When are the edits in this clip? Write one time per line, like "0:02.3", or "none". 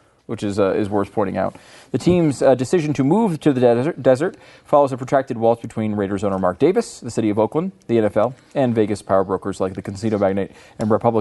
none